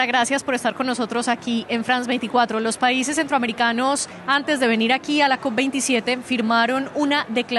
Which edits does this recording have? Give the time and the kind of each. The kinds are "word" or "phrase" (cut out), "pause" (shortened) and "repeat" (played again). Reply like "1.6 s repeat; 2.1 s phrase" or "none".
none